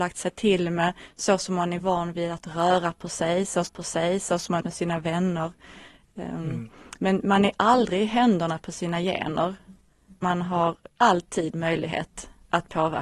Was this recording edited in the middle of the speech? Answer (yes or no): yes